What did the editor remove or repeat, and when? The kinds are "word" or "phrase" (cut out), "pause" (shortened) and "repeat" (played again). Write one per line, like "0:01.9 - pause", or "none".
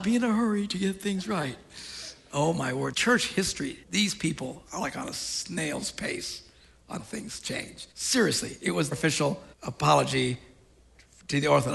0:02.9 - word
0:03.8 - pause
0:04.7 - pause
0:07.0 - word
0:07.9 - pause
0:08.9 - word
0:09.5 - pause